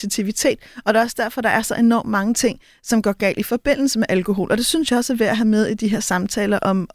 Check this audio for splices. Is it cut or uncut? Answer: uncut